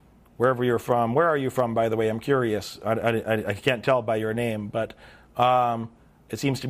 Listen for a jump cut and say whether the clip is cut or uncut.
uncut